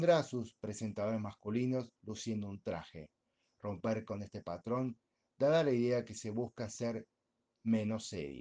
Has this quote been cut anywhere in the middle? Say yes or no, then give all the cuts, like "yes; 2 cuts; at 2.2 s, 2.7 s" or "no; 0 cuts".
no; 0 cuts